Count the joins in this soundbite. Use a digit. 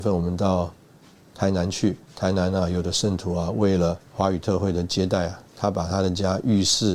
2